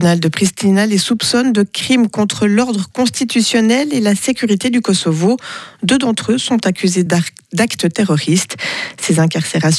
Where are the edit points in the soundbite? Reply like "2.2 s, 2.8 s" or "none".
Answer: none